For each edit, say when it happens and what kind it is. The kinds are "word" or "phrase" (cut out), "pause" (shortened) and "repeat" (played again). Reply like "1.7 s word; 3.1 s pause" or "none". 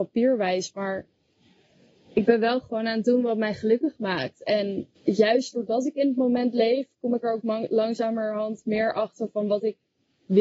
5.0 s pause